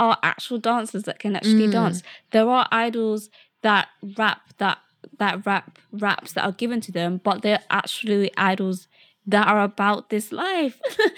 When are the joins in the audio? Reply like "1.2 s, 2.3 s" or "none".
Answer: none